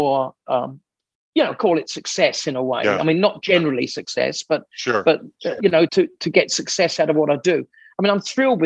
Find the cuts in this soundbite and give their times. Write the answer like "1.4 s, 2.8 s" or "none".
5.9 s